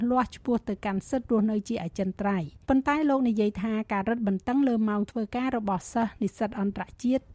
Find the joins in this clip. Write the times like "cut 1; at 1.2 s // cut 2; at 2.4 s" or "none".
cut 1; at 2.6 s